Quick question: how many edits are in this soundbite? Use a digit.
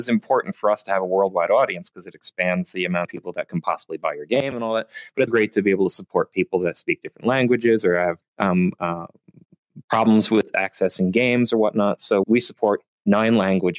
3